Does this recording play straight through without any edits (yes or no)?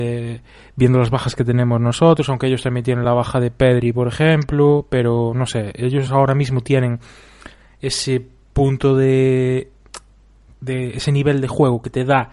yes